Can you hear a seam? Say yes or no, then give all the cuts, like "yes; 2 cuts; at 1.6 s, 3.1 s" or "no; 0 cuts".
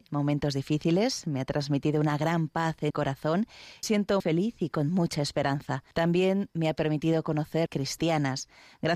yes; 5 cuts; at 2.9 s, 3.8 s, 4.2 s, 5.9 s, 7.7 s